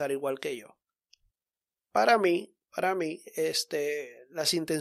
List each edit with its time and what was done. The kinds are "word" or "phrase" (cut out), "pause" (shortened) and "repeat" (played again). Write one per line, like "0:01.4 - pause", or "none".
none